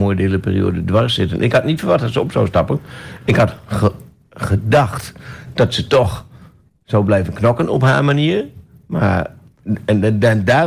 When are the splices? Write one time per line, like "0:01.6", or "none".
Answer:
none